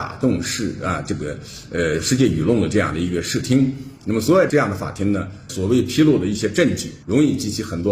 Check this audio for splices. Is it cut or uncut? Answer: cut